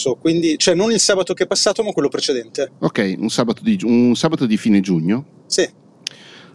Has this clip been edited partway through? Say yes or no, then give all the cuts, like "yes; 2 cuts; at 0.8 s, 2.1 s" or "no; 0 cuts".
no; 0 cuts